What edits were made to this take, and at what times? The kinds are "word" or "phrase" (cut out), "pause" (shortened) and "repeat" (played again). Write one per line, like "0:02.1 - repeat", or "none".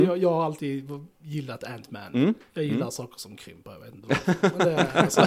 none